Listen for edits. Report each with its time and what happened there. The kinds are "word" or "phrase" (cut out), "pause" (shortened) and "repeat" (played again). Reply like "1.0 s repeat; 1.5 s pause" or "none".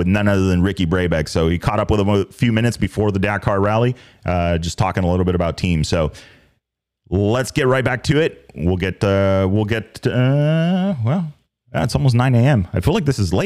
none